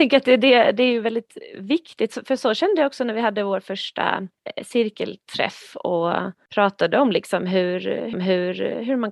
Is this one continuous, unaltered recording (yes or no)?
no